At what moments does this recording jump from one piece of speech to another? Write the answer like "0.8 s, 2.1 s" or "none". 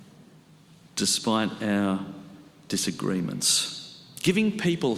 none